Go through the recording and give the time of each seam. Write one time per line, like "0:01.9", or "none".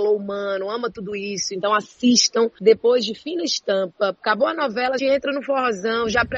0:05.0